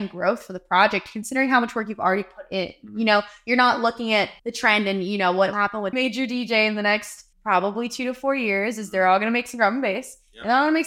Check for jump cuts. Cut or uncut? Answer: cut